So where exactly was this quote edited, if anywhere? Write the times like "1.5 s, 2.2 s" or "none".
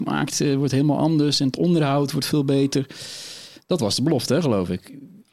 none

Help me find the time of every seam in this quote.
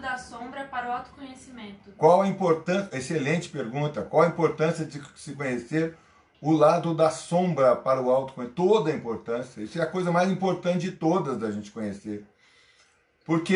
none

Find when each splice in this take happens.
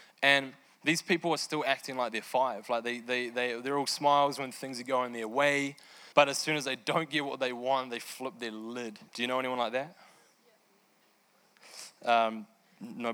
6.1 s, 9.1 s

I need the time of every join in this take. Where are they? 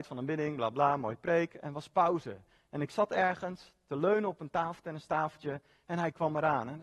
none

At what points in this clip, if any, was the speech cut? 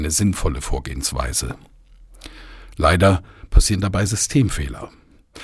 none

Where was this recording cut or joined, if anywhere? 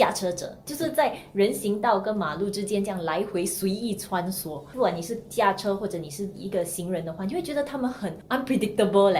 none

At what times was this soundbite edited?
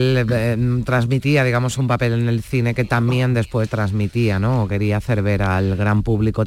none

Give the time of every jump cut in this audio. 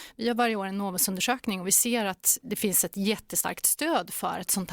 2.4 s

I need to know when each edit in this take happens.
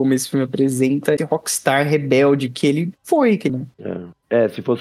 1.2 s, 3.0 s, 3.5 s

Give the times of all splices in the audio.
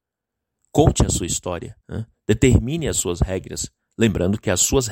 1.8 s

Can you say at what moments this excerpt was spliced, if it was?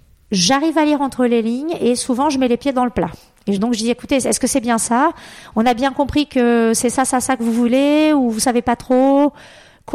none

